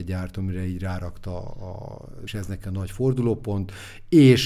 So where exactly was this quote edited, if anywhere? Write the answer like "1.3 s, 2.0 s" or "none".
2.3 s

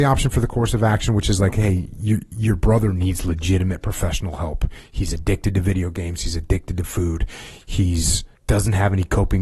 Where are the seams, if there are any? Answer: 8.4 s

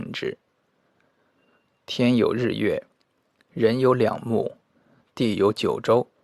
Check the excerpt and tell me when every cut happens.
none

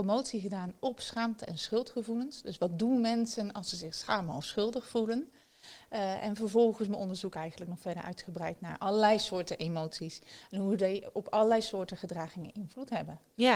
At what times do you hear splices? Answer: none

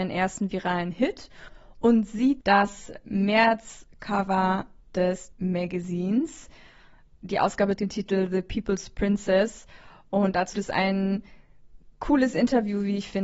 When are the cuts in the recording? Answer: 2.4 s, 5.3 s, 7.8 s, 10.5 s

